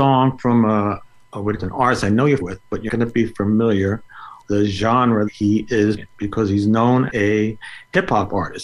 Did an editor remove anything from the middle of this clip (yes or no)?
yes